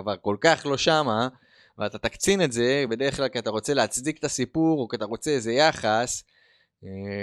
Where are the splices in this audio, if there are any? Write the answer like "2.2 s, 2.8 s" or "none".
none